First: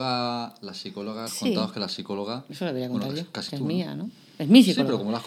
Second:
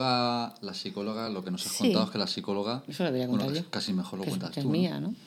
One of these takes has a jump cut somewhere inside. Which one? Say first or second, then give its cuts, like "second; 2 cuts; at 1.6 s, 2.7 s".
first; 2 cuts; at 1.3 s, 3.5 s